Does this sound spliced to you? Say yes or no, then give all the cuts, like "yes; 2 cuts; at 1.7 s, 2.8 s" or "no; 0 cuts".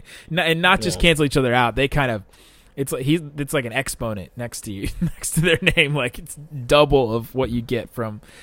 no; 0 cuts